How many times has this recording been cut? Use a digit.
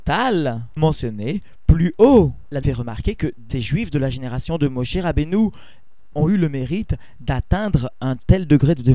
2